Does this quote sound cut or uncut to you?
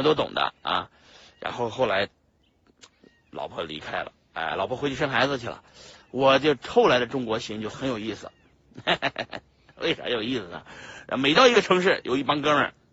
uncut